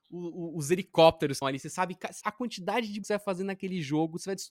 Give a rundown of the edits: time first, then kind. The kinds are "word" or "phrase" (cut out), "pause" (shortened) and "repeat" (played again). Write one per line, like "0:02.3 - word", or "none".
0:01.4 - word
0:02.2 - word
0:03.0 - word